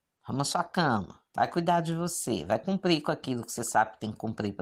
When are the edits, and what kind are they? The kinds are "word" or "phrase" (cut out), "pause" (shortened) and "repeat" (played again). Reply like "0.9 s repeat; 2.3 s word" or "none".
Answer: 1.3 s pause